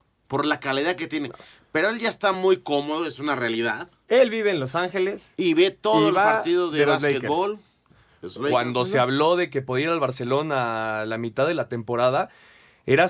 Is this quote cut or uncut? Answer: uncut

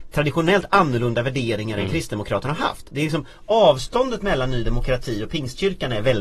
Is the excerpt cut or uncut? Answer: uncut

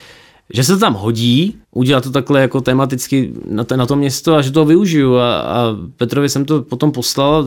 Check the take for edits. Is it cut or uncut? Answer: cut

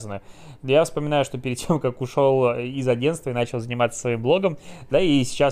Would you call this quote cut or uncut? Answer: uncut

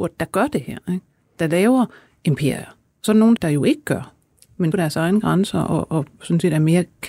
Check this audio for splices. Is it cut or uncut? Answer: cut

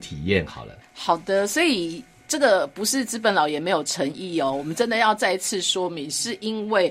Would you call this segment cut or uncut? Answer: uncut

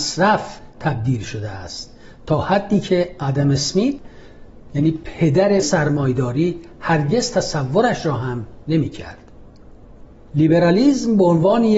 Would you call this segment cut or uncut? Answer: cut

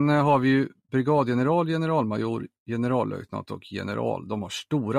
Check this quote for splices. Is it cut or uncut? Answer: uncut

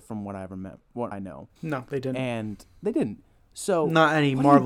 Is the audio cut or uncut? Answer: cut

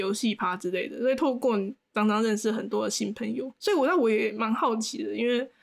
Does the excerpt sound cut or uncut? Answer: cut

